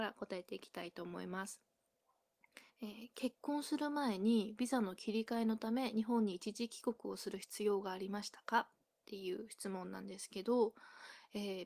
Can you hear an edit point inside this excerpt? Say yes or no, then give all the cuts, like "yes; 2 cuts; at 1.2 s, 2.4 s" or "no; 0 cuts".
yes; 2 cuts; at 2.7 s, 8.9 s